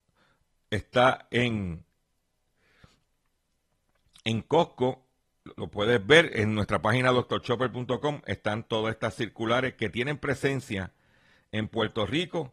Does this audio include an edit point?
yes; 1 cut; at 5.5 s

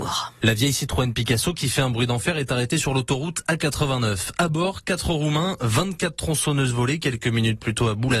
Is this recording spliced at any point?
no; 0 cuts

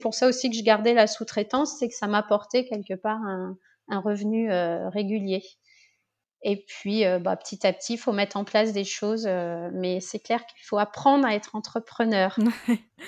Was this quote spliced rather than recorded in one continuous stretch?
no; 0 cuts

